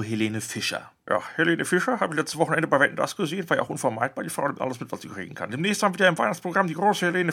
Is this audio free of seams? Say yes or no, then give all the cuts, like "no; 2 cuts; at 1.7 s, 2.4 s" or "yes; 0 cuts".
yes; 0 cuts